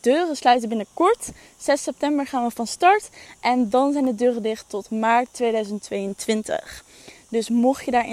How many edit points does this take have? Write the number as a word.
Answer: zero